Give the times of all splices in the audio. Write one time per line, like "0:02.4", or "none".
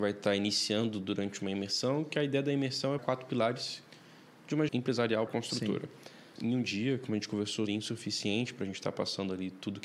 0:03.0
0:04.7
0:05.3
0:06.4
0:07.7